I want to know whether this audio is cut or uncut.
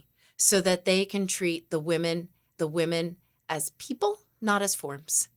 cut